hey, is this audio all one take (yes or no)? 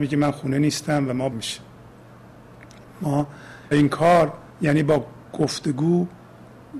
no